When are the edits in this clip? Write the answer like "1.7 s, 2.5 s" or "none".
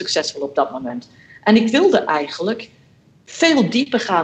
none